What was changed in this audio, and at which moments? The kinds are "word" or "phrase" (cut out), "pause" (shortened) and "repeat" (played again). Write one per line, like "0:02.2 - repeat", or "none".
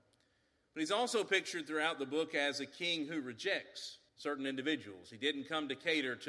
0:04.1 - pause